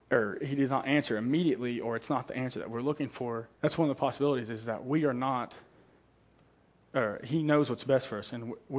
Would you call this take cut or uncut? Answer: cut